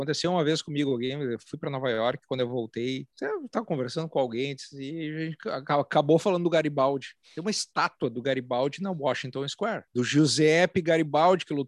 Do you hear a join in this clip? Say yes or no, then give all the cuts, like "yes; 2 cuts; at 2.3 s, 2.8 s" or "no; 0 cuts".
yes; 3 cuts; at 3.1 s, 7.2 s, 9.9 s